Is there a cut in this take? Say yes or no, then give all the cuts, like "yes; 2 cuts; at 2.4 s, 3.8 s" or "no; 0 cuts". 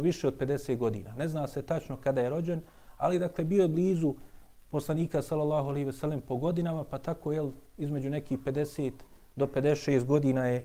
no; 0 cuts